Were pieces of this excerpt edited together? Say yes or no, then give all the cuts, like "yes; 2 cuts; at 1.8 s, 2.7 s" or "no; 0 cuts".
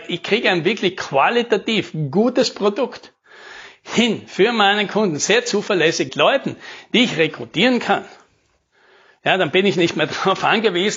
yes; 1 cut; at 6.1 s